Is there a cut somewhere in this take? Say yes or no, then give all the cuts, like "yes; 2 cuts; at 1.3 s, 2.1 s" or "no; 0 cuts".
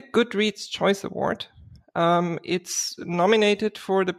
no; 0 cuts